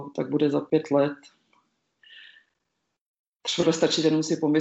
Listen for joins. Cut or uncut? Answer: cut